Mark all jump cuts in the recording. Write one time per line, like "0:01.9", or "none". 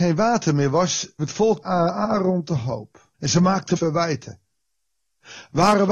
0:01.2
0:01.6
0:03.1
0:03.8